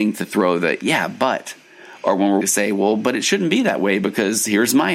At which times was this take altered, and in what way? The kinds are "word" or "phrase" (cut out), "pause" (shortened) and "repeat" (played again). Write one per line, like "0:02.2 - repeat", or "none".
0:02.4 - word